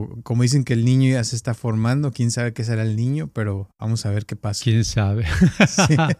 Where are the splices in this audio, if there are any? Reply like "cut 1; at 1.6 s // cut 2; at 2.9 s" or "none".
none